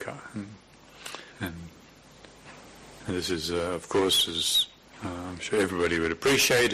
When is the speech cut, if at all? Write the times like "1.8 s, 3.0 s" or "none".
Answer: 1.3 s, 4.8 s